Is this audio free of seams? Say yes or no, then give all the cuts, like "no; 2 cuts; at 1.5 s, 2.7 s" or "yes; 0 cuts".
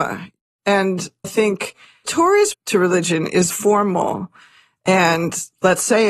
no; 4 cuts; at 1.2 s, 2.1 s, 2.5 s, 3.5 s